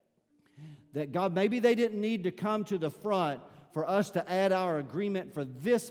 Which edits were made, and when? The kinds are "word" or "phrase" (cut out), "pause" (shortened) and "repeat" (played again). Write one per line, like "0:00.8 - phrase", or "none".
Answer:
none

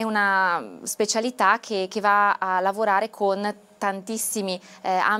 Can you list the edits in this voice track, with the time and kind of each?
none

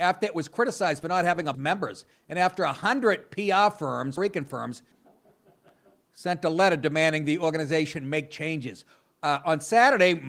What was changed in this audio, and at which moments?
0:01.5 - phrase
0:04.2 - word
0:04.9 - pause

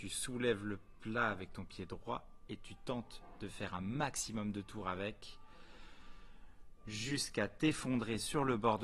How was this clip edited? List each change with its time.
none

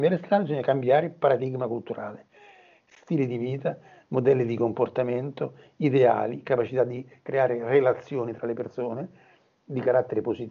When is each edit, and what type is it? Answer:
none

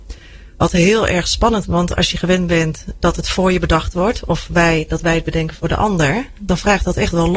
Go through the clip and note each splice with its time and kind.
0:01.6 - word
0:03.0 - word

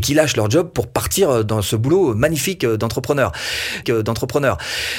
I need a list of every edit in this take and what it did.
0:03.8 - repeat

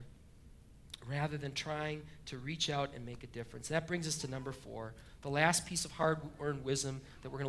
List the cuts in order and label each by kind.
none

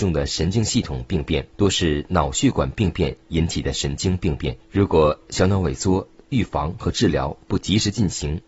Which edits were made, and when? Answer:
0:01.5 - pause
0:04.6 - pause

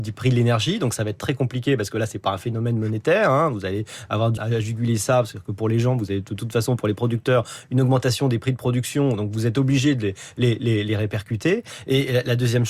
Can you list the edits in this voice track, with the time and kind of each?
0:04.4 - phrase

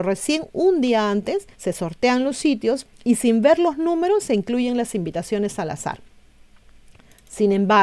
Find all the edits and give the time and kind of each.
0:01.5 - pause
0:02.9 - pause

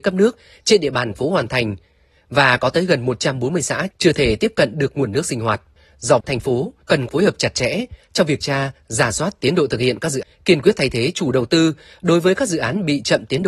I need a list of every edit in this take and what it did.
0:01.1 - word
0:06.2 - word
0:07.1 - word
0:08.4 - word
0:10.2 - word

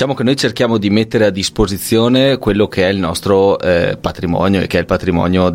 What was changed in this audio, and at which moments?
none

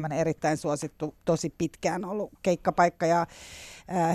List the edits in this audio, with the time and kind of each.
0:01.2 - pause

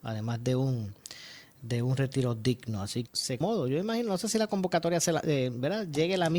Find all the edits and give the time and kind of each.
0:03.1 - phrase
0:03.4 - phrase

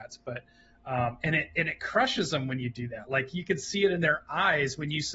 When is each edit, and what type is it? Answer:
none

